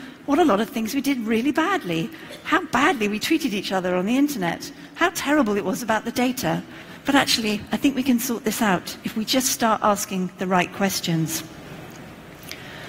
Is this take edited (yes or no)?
no